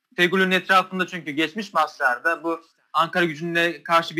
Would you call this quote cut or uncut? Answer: uncut